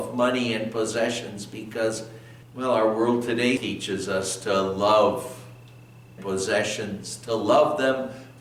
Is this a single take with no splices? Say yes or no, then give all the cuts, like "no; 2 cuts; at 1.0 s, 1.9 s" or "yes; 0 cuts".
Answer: no; 3 cuts; at 2.4 s, 3.6 s, 6.2 s